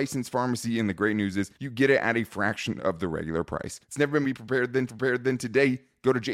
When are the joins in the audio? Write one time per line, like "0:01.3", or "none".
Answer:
0:01.5
0:03.8
0:04.2
0:04.9